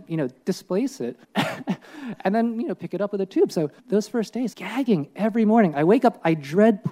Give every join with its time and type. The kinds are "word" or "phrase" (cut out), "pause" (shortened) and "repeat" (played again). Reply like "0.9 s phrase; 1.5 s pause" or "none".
1.2 s pause; 3.8 s pause; 4.5 s word